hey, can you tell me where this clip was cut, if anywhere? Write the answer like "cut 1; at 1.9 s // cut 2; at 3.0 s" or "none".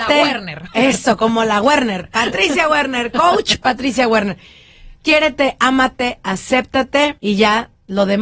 cut 1; at 7.2 s

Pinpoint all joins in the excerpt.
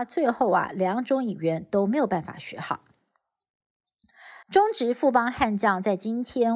cut 1; at 4.4 s

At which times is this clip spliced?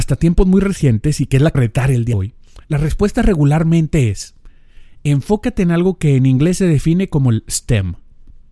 cut 1; at 1.5 s // cut 2; at 2.1 s

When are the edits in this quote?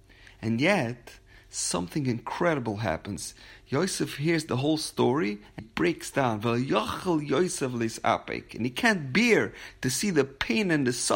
cut 1; at 5.6 s

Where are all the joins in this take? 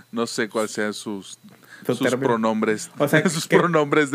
none

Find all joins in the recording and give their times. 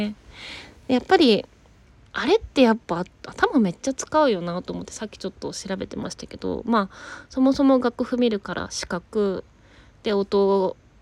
none

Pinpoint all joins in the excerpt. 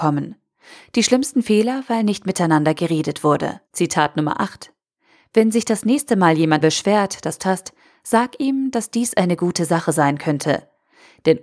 cut 1; at 3.7 s // cut 2; at 6.6 s // cut 3; at 7.4 s

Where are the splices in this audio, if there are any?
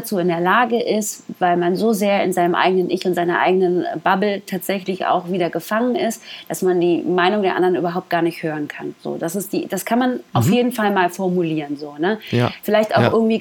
none

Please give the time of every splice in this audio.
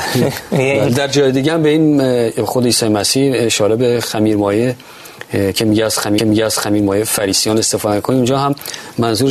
cut 1; at 6.2 s

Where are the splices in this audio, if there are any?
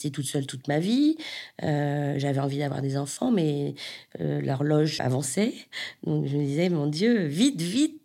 cut 1; at 5.0 s

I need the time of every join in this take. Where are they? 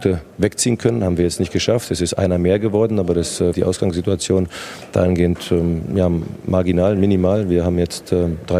cut 1; at 3.5 s

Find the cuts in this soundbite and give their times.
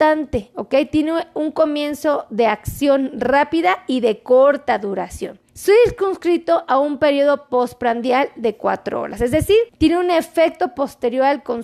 cut 1; at 5.5 s // cut 2; at 9.7 s

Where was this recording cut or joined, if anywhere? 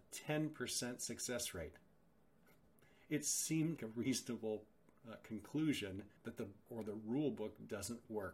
cut 1; at 3.8 s // cut 2; at 6.2 s // cut 3; at 6.7 s

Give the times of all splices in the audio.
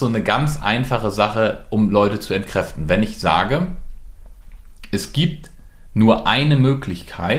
none

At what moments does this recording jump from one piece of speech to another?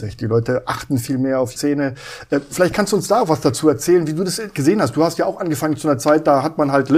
cut 1; at 1.5 s

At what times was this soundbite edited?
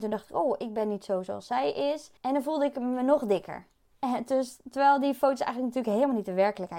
cut 1; at 2.2 s // cut 2; at 3.9 s

